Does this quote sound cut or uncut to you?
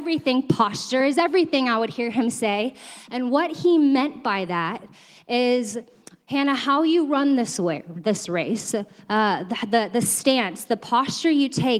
uncut